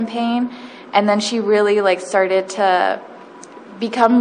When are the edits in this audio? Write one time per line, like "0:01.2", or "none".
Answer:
none